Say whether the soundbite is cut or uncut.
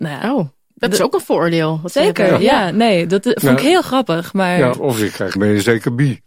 cut